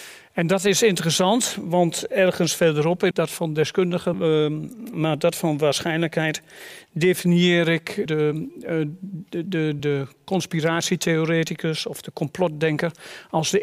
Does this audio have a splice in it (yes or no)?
yes